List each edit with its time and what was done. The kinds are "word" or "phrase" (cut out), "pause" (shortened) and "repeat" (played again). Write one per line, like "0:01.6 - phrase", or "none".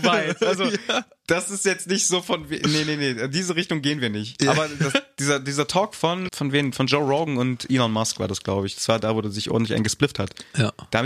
0:06.3 - word

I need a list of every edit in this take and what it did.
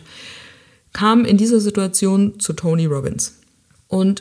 none

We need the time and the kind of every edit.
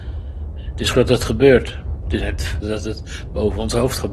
0:00.9 - word
0:02.2 - word
0:02.6 - word

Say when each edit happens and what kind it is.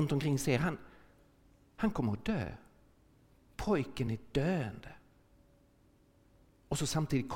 none

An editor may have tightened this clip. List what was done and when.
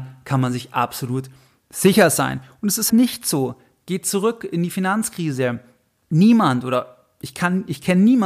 0:02.9 - word

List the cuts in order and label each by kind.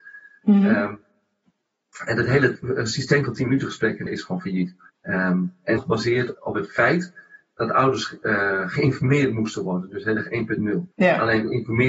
0:04.1 - word
0:04.9 - pause
0:05.8 - phrase
0:06.3 - word
0:10.9 - pause

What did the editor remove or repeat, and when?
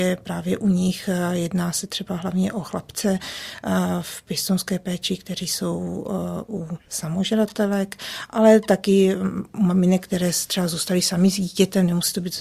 0:06.8 - word

